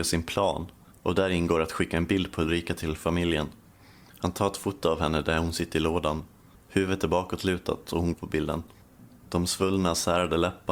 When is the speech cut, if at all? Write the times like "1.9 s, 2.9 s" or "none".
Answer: 8.1 s